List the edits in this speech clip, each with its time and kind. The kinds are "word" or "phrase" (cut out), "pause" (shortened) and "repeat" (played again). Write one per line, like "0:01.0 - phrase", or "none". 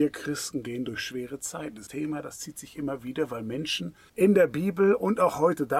0:01.9 - phrase
0:04.1 - pause